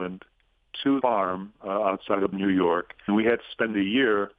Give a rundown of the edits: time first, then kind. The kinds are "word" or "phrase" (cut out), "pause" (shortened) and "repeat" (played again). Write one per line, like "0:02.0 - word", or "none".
0:01.0 - word
0:02.3 - word
0:03.1 - word